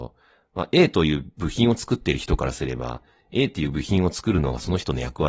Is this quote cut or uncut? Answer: uncut